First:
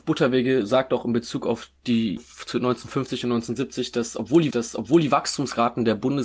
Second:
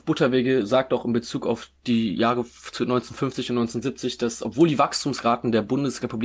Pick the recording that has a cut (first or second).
first